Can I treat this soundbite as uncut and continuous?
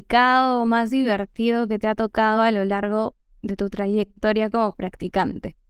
yes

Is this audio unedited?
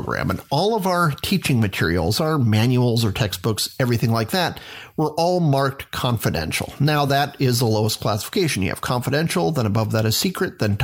yes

